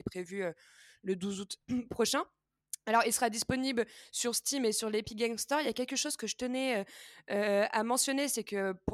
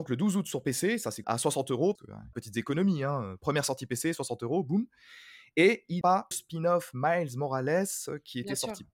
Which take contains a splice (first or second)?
second